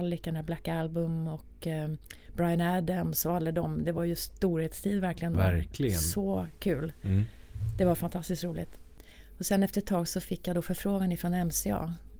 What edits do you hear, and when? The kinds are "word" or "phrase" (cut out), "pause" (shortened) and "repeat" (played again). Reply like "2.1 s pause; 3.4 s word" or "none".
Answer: none